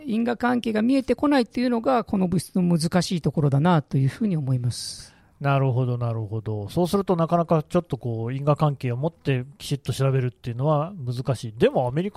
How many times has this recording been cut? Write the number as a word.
zero